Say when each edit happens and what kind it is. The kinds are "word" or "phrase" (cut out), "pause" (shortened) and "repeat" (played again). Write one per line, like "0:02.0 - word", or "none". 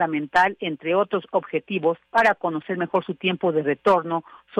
0:02.0 - pause

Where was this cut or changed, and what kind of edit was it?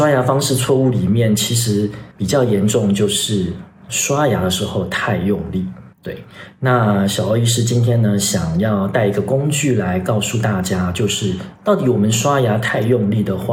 0:02.1 - pause
0:03.9 - word
0:05.9 - pause

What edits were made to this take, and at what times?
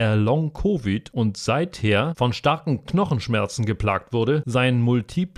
none

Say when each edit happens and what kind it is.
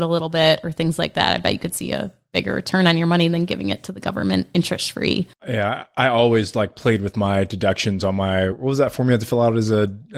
0:08.5 - word

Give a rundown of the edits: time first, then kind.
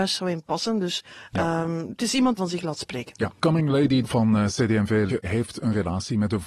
0:02.4 - phrase
0:03.4 - word
0:04.0 - word
0:05.1 - word

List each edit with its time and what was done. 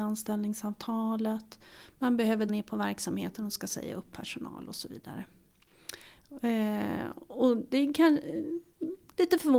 0:02.5 - word

